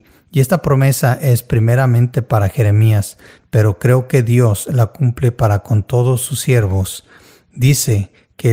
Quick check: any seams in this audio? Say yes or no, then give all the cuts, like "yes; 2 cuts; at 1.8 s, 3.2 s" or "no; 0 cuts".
no; 0 cuts